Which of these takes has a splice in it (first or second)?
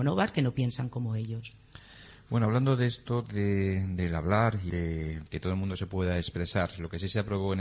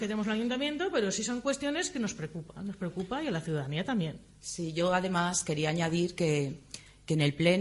first